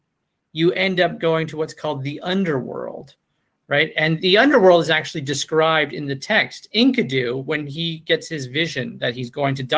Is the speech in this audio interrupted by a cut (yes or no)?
no